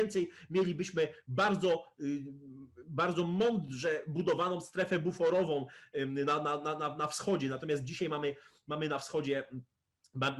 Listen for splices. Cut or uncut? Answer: uncut